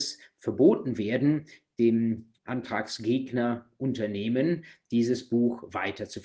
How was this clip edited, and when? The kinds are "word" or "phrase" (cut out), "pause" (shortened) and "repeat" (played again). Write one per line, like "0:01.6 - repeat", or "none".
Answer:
0:02.4 - pause